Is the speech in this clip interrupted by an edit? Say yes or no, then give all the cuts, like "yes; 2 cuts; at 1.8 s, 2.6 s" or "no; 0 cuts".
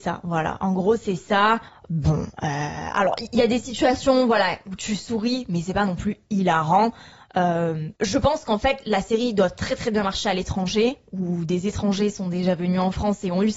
yes; 2 cuts; at 1.7 s, 8.0 s